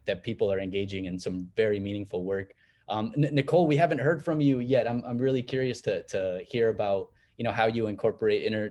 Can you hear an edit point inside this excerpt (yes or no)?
no